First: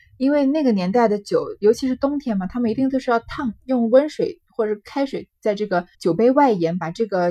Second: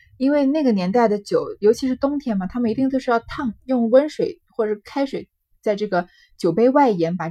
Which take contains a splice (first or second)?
first